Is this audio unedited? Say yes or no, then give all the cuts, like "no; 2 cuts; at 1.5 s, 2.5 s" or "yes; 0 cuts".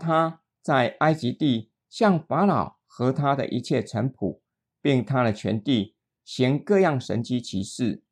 yes; 0 cuts